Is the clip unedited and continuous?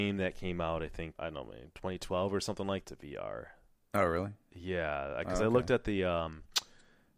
no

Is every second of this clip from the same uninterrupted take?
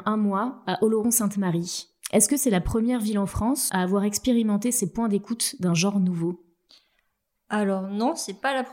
yes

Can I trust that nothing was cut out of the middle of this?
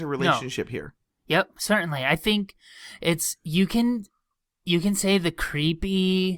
yes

